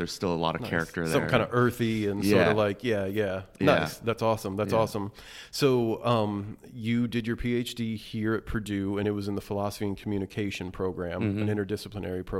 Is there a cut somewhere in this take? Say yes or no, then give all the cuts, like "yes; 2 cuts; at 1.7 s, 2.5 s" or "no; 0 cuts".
no; 0 cuts